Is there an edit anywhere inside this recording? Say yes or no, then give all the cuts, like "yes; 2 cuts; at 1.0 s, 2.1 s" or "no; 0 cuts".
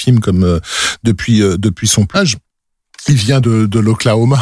yes; 2 cuts; at 2.1 s, 3.4 s